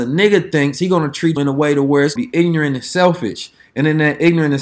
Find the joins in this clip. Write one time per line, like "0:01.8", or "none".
0:01.4
0:02.2